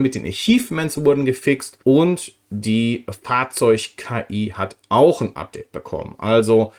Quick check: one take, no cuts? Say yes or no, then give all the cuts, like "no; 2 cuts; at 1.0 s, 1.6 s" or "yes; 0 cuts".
no; 1 cut; at 1.8 s